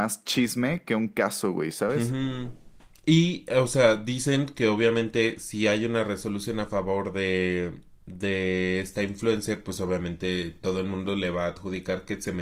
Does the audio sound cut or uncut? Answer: uncut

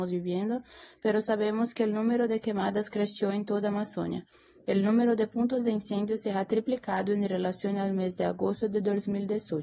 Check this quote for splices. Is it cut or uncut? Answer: uncut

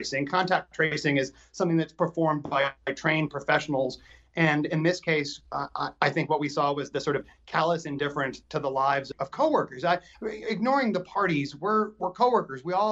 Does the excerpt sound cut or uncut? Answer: uncut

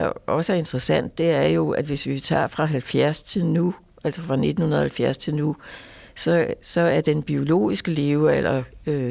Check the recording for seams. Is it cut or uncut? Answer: uncut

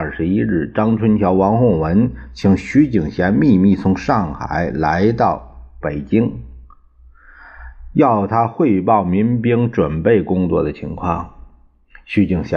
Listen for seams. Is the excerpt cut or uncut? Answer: uncut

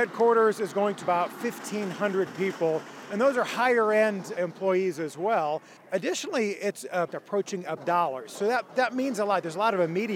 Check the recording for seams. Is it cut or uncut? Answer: cut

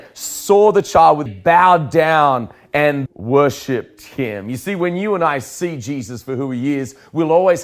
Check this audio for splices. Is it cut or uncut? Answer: cut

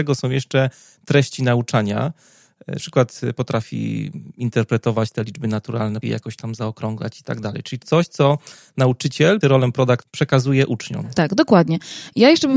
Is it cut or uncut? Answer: cut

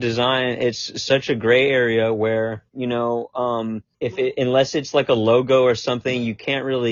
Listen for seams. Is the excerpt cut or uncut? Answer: cut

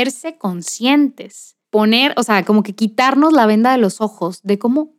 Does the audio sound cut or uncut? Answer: cut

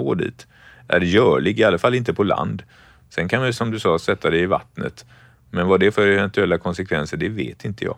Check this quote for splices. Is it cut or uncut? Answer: cut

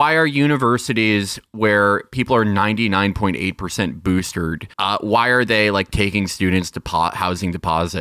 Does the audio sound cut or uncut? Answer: cut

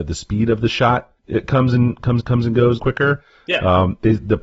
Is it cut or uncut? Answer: cut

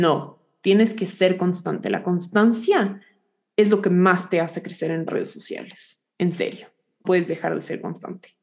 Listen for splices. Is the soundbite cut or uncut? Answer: cut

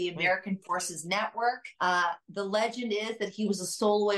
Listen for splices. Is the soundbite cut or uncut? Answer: cut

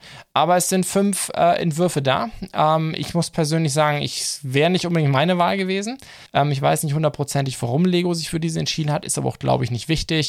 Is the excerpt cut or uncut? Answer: cut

